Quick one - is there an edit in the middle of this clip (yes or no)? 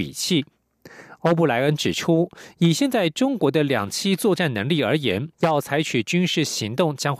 yes